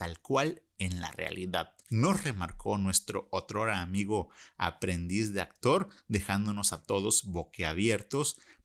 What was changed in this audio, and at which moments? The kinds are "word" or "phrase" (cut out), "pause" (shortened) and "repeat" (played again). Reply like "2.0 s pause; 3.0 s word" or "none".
1.8 s pause